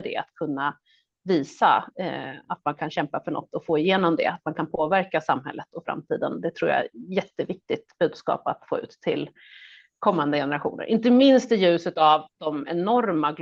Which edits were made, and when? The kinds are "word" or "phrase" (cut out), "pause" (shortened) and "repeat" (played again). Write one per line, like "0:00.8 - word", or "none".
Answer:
none